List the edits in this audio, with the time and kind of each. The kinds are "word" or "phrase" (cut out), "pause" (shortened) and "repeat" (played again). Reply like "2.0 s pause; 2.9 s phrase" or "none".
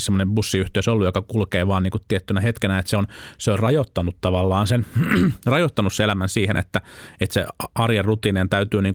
none